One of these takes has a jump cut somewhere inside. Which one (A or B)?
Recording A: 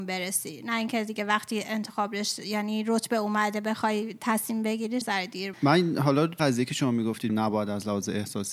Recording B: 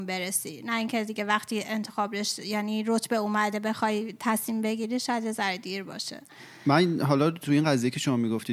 A